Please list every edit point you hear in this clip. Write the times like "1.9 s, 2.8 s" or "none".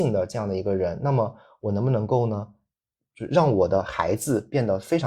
none